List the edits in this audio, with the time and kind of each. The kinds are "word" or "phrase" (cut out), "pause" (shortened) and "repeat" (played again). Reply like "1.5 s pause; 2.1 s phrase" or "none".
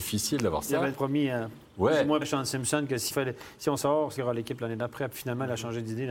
0.9 s word; 2.2 s word; 3.1 s word; 3.8 s word; 4.2 s word